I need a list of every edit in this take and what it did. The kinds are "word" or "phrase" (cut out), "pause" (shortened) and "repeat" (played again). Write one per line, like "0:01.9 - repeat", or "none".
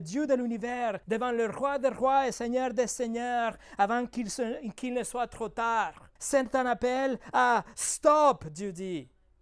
0:01.0 - pause
0:06.2 - pause